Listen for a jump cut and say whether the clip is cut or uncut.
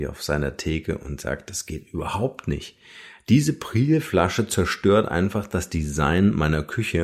uncut